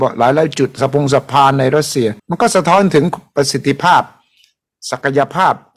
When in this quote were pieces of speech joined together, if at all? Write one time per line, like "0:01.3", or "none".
0:02.2